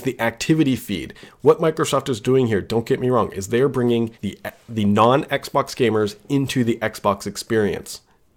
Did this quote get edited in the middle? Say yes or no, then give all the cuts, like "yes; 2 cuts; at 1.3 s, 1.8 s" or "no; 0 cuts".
yes; 1 cut; at 4.1 s